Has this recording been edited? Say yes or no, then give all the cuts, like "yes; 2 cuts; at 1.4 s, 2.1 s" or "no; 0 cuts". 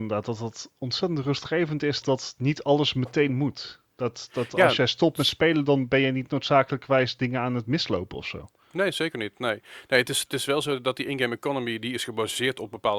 yes; 1 cut; at 2.0 s